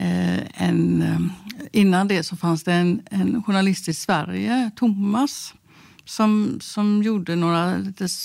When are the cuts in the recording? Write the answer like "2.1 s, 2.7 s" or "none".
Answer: none